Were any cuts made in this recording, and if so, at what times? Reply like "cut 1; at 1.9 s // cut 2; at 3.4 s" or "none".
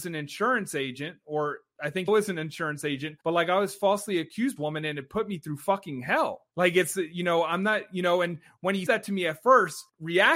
cut 1; at 2.1 s // cut 2; at 3.2 s // cut 3; at 4.6 s // cut 4; at 6.5 s // cut 5; at 8.9 s